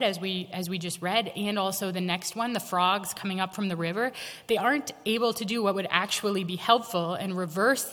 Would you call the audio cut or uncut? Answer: uncut